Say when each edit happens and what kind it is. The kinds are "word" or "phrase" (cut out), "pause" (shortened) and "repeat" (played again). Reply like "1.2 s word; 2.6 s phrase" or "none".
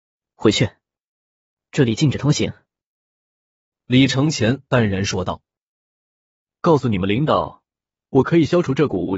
none